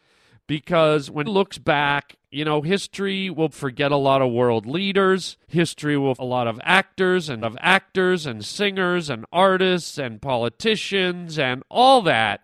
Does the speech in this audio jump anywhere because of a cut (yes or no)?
yes